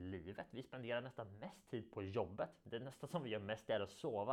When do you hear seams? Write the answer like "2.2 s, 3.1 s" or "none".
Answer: none